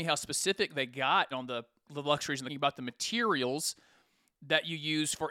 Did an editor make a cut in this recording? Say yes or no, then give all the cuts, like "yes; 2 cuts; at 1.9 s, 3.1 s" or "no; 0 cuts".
yes; 3 cuts; at 1.3 s, 1.9 s, 2.5 s